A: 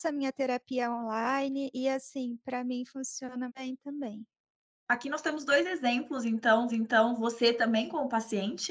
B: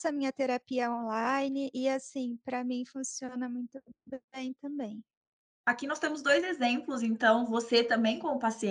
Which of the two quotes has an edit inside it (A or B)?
A